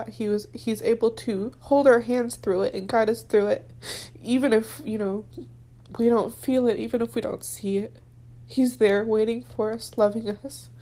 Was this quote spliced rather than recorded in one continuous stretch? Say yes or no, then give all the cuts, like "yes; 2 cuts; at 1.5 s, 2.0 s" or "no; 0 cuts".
no; 0 cuts